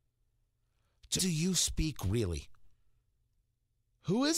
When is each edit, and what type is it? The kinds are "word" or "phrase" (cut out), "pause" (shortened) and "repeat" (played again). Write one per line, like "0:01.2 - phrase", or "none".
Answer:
0:01.2 - word